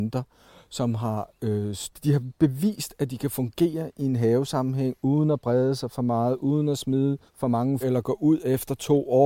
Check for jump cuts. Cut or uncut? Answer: cut